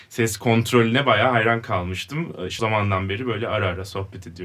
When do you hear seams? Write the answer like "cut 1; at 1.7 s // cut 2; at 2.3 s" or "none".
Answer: cut 1; at 2.6 s